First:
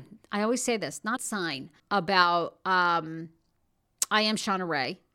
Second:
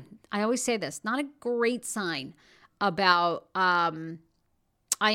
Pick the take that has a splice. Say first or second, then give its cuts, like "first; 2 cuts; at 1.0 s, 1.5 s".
first; 2 cuts; at 1.2 s, 1.8 s